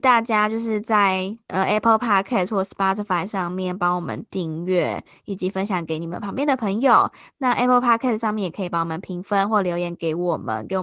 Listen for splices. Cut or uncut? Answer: uncut